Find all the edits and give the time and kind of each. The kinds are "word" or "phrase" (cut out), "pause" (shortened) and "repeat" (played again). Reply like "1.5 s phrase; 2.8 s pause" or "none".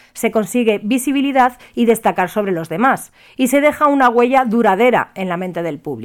none